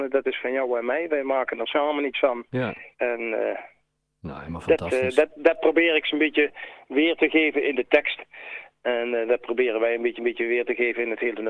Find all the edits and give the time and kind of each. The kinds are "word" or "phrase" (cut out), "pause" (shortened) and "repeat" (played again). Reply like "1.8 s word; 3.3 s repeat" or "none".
2.9 s pause; 10.2 s repeat